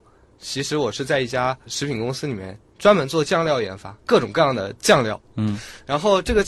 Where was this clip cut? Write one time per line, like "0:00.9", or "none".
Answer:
0:02.7
0:04.0